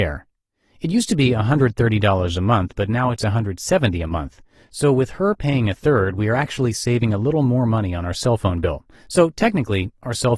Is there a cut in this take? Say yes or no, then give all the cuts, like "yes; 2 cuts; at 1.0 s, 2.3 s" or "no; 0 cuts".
no; 0 cuts